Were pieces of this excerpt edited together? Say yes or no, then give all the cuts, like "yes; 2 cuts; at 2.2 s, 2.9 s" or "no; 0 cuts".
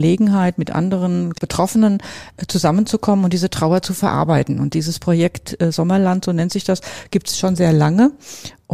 no; 0 cuts